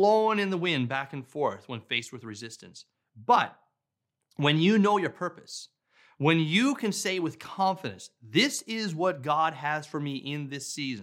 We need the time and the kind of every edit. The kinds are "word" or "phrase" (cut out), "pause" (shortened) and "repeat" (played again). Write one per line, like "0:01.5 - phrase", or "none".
none